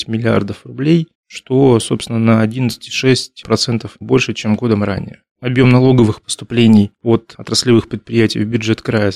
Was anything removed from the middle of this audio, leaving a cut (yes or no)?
yes